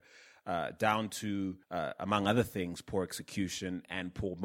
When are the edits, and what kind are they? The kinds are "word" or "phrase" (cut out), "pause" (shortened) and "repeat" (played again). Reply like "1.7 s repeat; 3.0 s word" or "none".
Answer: 1.6 s pause